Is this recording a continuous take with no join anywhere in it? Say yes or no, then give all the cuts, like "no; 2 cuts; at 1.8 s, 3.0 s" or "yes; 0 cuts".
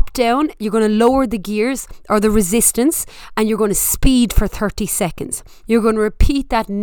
yes; 0 cuts